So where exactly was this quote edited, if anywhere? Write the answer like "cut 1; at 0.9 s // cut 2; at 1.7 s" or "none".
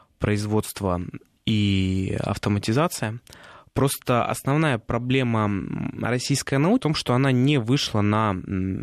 cut 1; at 1.4 s // cut 2; at 6.8 s